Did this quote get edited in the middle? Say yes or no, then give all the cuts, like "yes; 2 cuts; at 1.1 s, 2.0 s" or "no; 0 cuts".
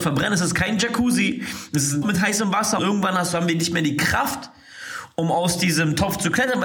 yes; 2 cuts; at 2.0 s, 2.8 s